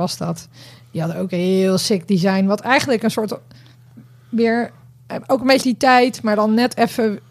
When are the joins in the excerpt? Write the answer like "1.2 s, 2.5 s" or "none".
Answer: 5.6 s